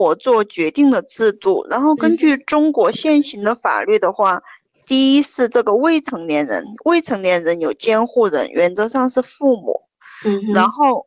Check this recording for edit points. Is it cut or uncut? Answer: uncut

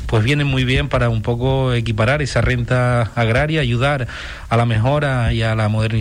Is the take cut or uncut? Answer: uncut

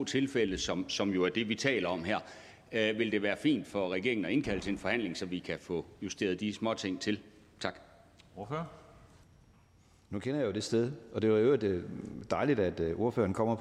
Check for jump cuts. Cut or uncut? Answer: uncut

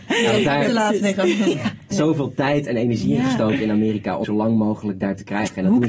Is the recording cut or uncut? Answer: cut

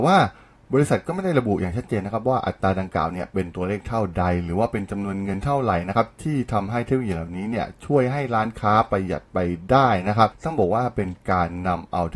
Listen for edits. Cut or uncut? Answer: uncut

